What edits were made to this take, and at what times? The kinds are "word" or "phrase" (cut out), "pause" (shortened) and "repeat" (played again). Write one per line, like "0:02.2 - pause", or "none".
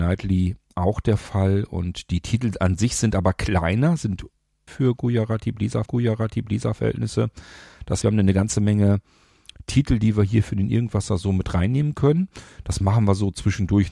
0:04.7 - phrase
0:05.9 - repeat
0:08.0 - word